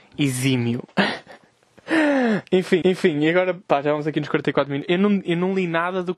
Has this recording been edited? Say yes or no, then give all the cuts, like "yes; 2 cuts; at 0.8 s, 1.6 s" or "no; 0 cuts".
yes; 2 cuts; at 2.8 s, 3.6 s